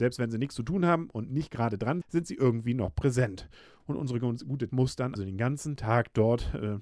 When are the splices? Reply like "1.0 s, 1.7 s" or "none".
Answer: 2.0 s, 4.7 s, 5.2 s